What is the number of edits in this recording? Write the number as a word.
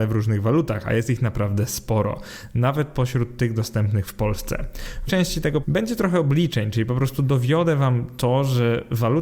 two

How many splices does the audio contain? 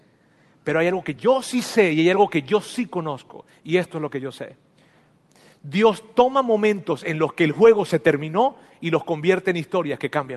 zero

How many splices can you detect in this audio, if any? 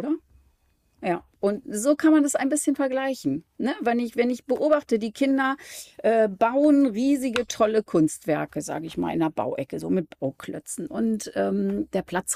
zero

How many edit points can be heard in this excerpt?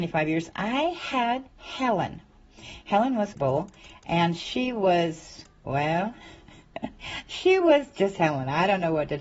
three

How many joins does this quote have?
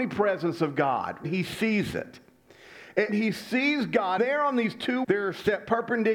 four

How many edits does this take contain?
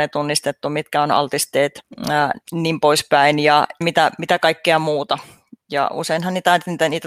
two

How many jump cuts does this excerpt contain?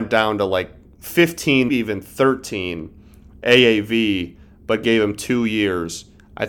one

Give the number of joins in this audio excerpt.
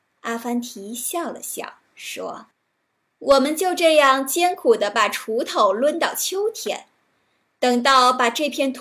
one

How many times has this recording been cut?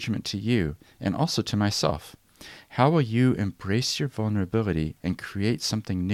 zero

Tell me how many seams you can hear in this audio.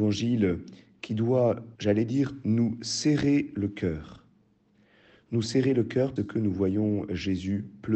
two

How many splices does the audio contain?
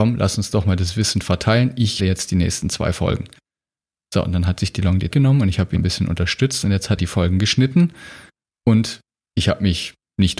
four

